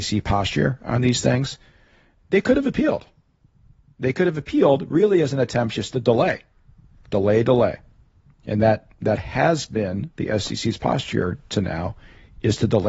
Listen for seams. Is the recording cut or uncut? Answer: uncut